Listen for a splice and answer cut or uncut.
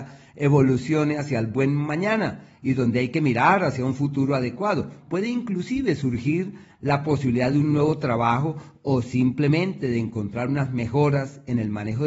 uncut